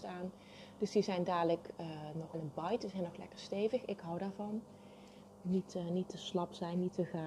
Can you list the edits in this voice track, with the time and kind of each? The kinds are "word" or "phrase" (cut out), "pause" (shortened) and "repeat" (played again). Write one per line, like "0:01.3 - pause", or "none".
0:02.3 - phrase